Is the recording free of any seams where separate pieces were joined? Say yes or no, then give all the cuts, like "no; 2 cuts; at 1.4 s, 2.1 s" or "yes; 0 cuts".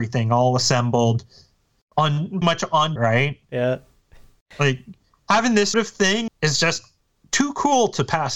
no; 4 cuts; at 2.4 s, 3.0 s, 5.7 s, 6.3 s